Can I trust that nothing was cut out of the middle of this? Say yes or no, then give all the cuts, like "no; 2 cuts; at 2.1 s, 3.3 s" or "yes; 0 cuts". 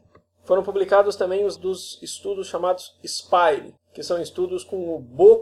no; 2 cuts; at 1.6 s, 3.8 s